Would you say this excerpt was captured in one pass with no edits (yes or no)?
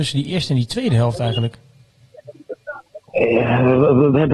no